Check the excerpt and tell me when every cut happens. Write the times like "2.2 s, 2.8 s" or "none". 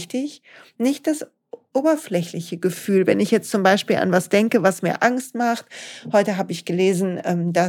none